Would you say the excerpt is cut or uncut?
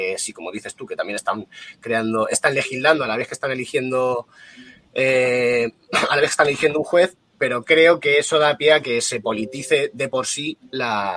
uncut